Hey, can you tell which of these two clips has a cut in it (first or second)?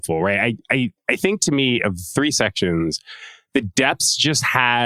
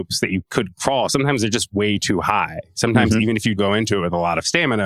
second